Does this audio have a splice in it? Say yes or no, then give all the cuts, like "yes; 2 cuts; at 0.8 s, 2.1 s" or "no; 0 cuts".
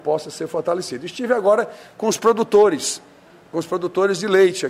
no; 0 cuts